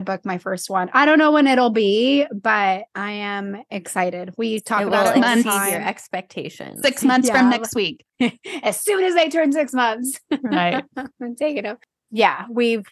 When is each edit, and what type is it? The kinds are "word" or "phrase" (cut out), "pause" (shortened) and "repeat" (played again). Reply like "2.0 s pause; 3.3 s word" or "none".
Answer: 2.9 s pause; 8.1 s pause